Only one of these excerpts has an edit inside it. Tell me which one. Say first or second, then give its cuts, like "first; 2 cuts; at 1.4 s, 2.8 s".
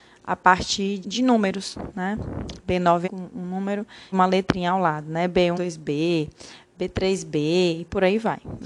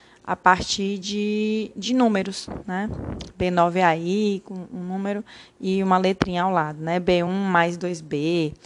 first; 4 cuts; at 1.0 s, 3.0 s, 4.1 s, 5.5 s